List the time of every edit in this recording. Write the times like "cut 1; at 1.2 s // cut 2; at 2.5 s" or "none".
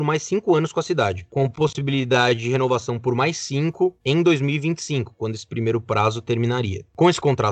cut 1; at 4.0 s

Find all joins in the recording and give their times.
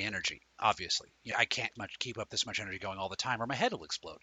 cut 1; at 1.3 s // cut 2; at 1.8 s

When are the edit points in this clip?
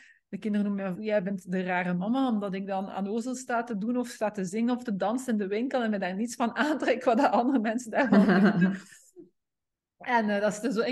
cut 1; at 0.9 s

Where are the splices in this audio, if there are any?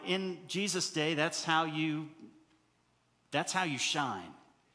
none

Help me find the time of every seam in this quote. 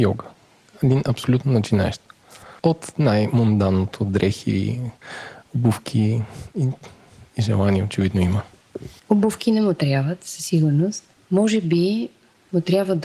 cut 1; at 2.6 s // cut 2; at 9.0 s

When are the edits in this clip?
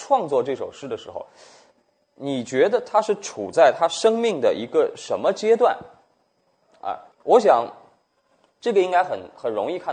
cut 1; at 7.1 s

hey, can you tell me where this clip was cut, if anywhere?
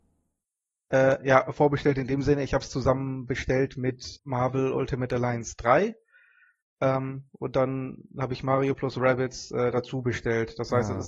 cut 1; at 4.2 s

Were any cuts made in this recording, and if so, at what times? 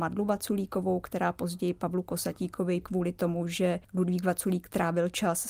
cut 1; at 2.8 s // cut 2; at 3.8 s

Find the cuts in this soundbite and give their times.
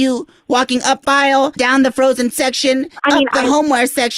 cut 1; at 1.0 s // cut 2; at 1.6 s // cut 3; at 2.3 s // cut 4; at 3.0 s

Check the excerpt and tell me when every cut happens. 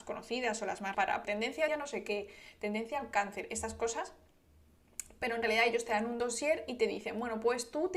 cut 1; at 0.9 s // cut 2; at 1.2 s // cut 3; at 1.7 s

